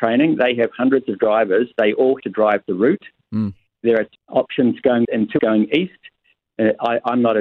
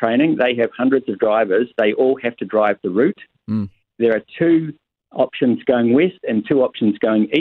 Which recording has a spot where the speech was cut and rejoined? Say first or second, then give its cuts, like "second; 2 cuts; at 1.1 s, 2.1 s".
first; 4 cuts; at 2.2 s, 4.1 s, 5.0 s, 5.4 s